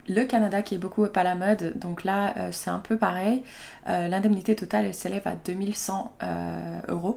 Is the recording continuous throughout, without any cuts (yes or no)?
yes